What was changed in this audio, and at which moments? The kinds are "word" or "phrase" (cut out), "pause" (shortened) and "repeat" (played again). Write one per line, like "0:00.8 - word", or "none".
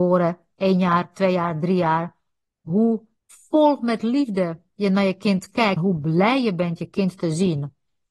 0:03.2 - pause
0:05.8 - word